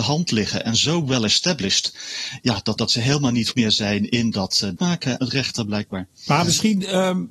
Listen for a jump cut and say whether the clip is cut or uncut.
cut